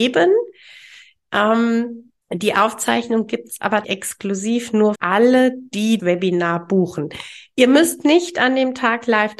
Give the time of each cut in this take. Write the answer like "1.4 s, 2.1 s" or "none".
2.2 s, 3.8 s, 4.9 s, 6.0 s